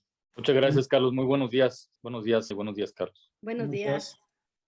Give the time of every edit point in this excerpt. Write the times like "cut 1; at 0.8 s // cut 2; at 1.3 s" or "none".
cut 1; at 2.0 s // cut 2; at 2.5 s // cut 3; at 3.4 s